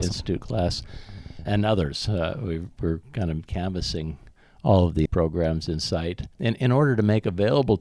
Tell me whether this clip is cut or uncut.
cut